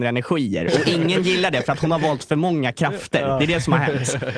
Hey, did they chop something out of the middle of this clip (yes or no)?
no